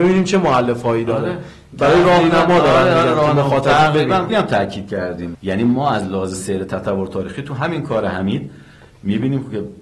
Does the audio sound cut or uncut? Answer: cut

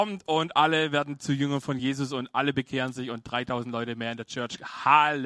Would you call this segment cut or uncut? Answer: uncut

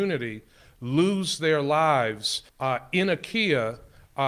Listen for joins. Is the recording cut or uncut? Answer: cut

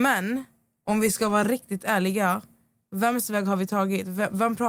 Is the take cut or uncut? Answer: uncut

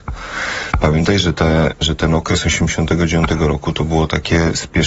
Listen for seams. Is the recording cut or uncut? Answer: uncut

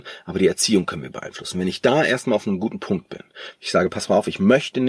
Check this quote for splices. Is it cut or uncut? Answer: uncut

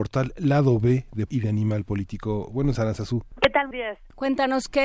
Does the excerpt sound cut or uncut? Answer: cut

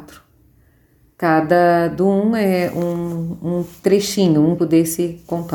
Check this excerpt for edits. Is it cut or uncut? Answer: cut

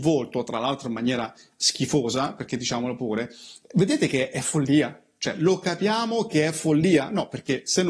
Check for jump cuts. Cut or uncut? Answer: uncut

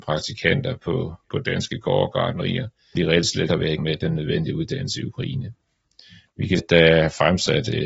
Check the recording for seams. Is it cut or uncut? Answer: cut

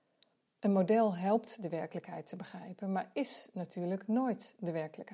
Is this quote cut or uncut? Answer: uncut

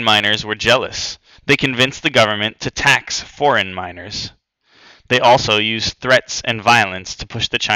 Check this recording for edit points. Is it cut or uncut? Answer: cut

